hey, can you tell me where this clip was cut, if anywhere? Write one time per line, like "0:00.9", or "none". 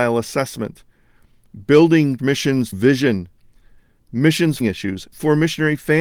0:02.2
0:02.7
0:04.6
0:05.1